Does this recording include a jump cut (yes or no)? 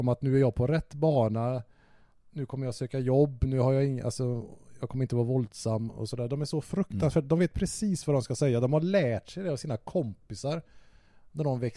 no